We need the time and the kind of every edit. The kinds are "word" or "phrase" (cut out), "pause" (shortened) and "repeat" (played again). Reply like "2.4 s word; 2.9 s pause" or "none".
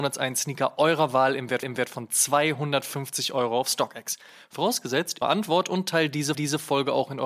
1.6 s repeat; 5.2 s phrase; 6.3 s repeat